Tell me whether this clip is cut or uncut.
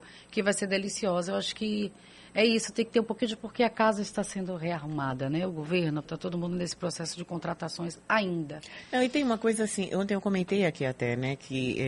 cut